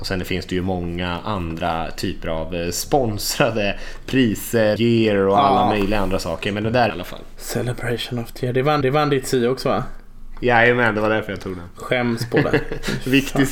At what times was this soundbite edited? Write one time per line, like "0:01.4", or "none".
0:04.8
0:06.9
0:08.8